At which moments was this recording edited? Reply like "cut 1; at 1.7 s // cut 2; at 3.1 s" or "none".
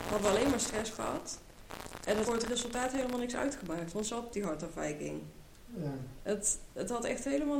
cut 1; at 2.2 s // cut 2; at 4.3 s